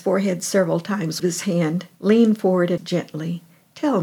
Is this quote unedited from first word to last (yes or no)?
no